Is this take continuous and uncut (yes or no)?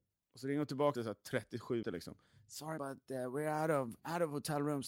no